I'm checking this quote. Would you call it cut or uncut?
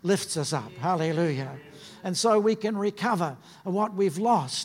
uncut